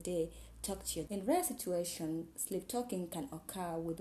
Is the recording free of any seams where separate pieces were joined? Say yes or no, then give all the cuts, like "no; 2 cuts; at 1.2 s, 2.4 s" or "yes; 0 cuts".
no; 1 cut; at 1.1 s